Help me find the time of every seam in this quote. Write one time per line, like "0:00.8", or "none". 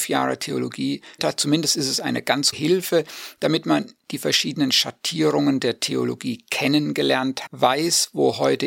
0:01.2
0:02.5
0:07.5